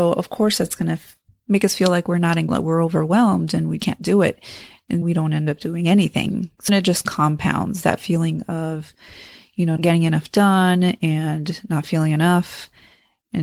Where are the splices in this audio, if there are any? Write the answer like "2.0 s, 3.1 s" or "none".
2.5 s, 3.8 s, 5.0 s, 6.7 s, 9.8 s